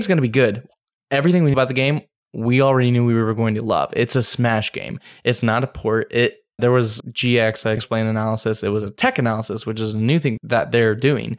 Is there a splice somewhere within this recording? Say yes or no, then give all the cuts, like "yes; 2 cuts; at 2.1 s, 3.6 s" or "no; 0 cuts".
yes; 5 cuts; at 1.5 s, 6.6 s, 7.0 s, 7.8 s, 10.4 s